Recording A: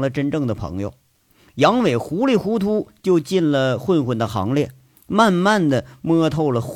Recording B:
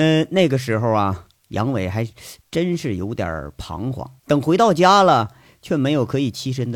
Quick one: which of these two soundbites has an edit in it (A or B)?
B